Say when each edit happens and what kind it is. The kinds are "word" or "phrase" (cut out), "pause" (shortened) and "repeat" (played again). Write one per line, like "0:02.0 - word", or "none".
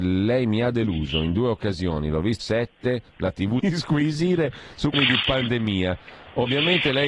0:02.4 - word
0:03.6 - phrase
0:04.9 - word